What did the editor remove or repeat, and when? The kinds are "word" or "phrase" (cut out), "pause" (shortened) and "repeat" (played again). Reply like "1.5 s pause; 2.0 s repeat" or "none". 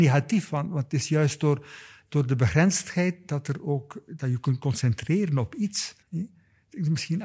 6.0 s pause